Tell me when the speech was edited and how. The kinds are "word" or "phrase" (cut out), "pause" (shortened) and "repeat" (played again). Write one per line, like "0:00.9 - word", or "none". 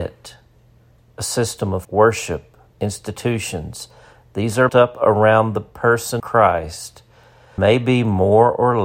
0:01.8 - word
0:02.7 - word
0:04.7 - word
0:06.2 - word
0:07.6 - word